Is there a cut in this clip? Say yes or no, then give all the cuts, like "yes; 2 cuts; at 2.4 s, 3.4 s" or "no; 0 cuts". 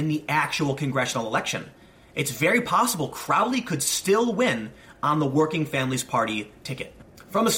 no; 0 cuts